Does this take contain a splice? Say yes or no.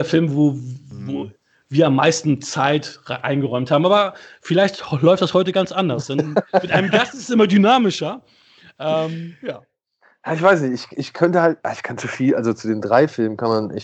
no